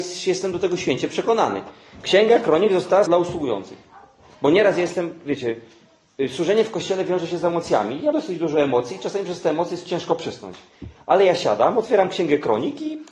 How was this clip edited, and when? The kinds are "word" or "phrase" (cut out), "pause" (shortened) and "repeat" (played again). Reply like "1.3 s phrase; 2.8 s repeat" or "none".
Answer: 3.1 s word; 8.1 s word